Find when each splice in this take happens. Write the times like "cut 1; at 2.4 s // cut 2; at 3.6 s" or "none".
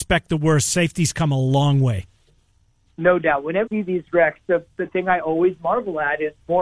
cut 1; at 3.7 s